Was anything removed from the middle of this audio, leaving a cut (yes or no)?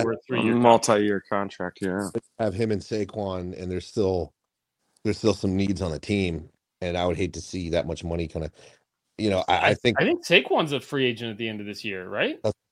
no